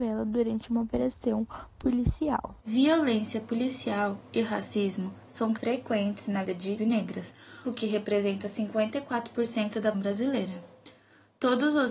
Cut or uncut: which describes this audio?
cut